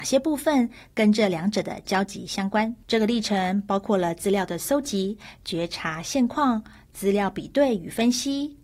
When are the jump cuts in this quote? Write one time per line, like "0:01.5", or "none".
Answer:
0:02.8